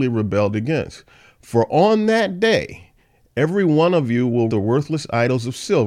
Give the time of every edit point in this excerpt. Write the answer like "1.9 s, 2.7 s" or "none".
4.5 s